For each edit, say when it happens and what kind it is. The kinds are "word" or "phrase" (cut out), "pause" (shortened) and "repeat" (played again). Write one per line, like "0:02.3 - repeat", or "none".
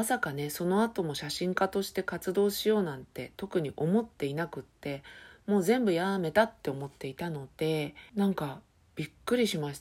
none